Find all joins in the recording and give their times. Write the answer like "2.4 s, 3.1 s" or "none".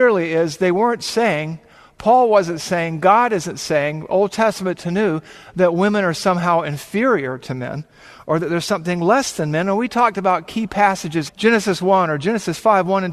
11.3 s